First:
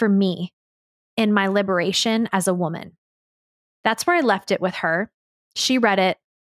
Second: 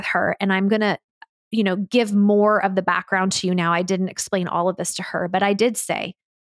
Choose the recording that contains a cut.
first; 1 cut; at 3.5 s

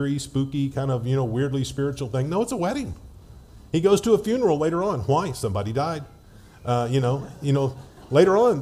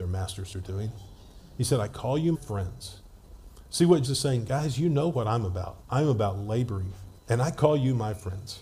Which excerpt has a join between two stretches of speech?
second; 4 cuts; at 2.3 s, 4.0 s, 5.8 s, 7.2 s

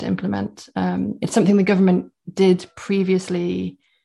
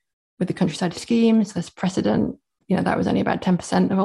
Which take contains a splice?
second; 2 cuts; at 0.9 s, 2.6 s

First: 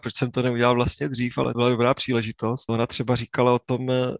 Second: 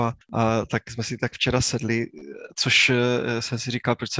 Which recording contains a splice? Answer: first; 2 cuts; at 1.5 s, 2.7 s

